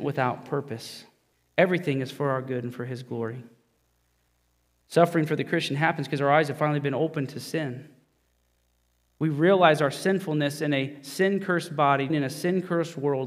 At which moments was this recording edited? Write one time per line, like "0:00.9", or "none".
0:01.3
0:12.1